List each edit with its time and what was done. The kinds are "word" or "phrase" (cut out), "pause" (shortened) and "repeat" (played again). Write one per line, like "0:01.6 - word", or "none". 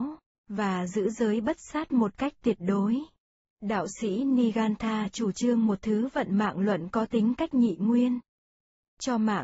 none